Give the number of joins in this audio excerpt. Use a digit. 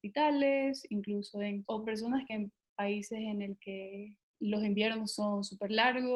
3